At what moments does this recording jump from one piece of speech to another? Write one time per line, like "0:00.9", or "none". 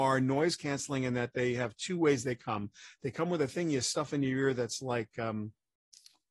none